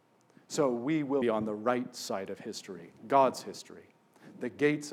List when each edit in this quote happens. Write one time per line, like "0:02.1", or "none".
0:01.2
0:03.0